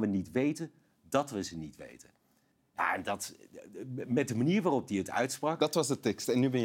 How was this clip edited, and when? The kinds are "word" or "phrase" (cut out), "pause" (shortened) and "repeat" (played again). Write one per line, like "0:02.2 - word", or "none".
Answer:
0:02.5 - pause